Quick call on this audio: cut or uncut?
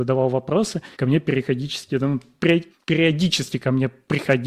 cut